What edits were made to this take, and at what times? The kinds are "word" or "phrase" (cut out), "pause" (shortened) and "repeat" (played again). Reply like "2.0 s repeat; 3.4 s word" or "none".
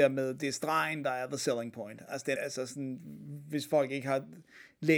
2.4 s word